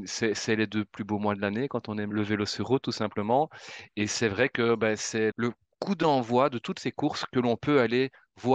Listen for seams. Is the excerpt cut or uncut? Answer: cut